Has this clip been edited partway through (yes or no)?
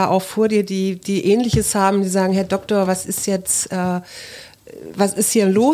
no